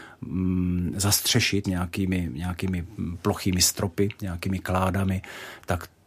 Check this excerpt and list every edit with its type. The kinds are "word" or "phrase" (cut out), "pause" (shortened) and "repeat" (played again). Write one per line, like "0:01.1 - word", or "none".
0:01.6 - word

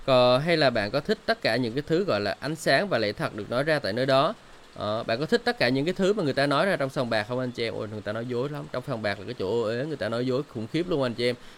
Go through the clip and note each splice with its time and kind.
none

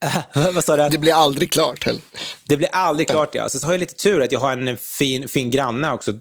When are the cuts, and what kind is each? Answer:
none

